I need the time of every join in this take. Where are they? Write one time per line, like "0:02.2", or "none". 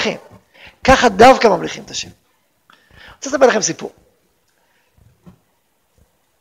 none